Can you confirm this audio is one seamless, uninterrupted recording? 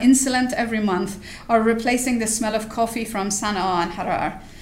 yes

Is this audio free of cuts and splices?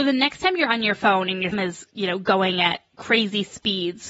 no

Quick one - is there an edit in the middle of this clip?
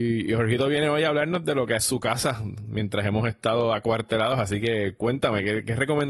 yes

